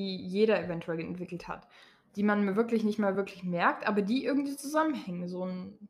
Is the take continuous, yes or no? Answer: yes